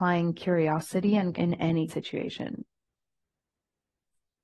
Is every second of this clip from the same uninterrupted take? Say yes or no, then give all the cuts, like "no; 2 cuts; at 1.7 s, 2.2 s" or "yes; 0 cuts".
no; 2 cuts; at 1.3 s, 1.9 s